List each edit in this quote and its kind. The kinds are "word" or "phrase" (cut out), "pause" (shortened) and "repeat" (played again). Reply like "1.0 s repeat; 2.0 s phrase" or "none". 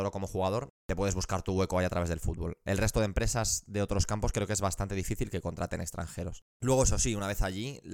6.5 s pause